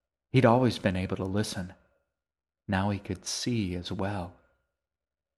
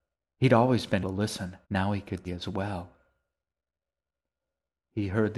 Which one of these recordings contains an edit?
second; 3 cuts; at 1.0 s, 1.6 s, 2.2 s

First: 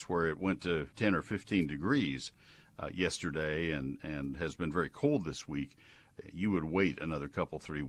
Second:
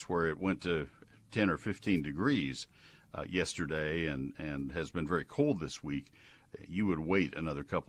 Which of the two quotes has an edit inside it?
first; 1 cut; at 0.9 s

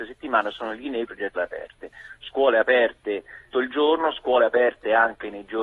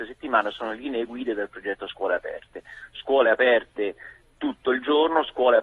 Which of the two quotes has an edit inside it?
first; 3 cuts; at 1.1 s, 1.4 s, 3.5 s

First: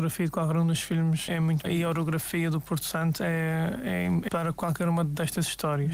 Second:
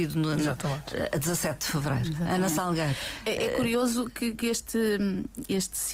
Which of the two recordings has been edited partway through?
first; 3 cuts; at 1.3 s, 1.6 s, 4.3 s

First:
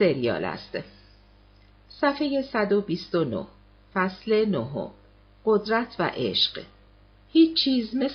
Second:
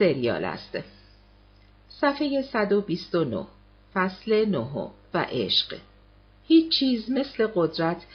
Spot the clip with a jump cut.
second; 1 cut; at 5.1 s

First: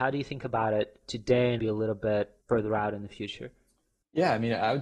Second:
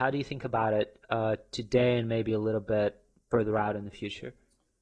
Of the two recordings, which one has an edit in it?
first; 3 cuts; at 1.0 s, 1.6 s, 2.4 s

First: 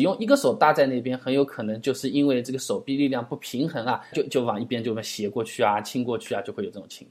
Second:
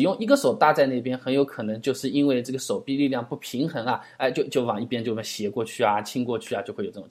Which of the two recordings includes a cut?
first; 1 cut; at 4.1 s

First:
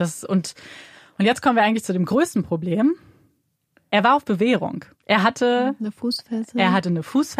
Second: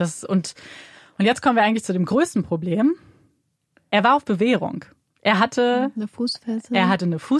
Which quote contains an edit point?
first; 1 cut; at 4.9 s

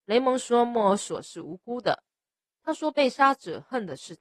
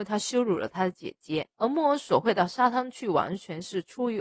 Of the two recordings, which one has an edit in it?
second; 1 cut; at 1.5 s

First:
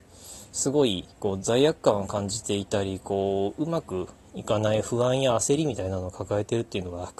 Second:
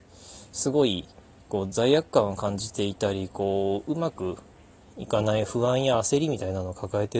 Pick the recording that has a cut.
first; 2 cuts; at 1.1 s, 4.1 s

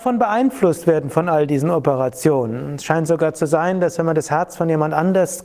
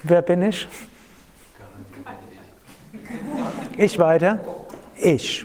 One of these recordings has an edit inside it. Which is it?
second; 1 cut; at 4.0 s

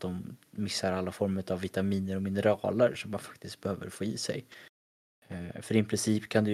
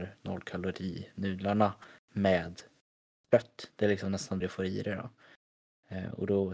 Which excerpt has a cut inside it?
second; 1 cut; at 4.4 s

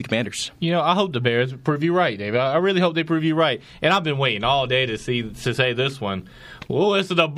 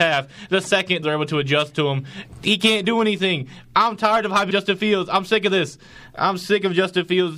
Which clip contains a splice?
second; 2 cuts; at 1.0 s, 4.5 s

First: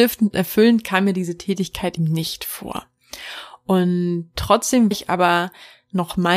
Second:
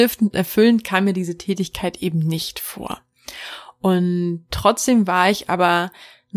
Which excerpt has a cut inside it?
first; 2 cuts; at 2.0 s, 4.9 s

